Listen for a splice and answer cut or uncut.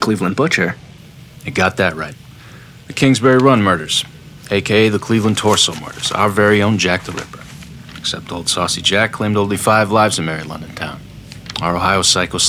uncut